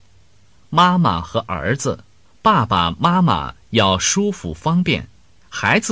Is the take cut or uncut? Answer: cut